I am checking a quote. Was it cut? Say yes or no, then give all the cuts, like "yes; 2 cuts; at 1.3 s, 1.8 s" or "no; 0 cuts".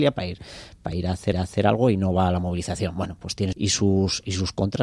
yes; 2 cuts; at 1.3 s, 3.5 s